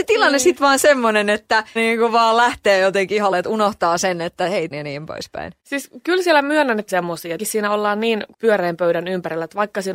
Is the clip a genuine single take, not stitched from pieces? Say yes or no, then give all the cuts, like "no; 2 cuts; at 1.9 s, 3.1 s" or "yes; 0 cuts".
no; 7 cuts; at 1.8 s, 3.3 s, 4.7 s, 5.6 s, 6.9 s, 7.4 s, 8.3 s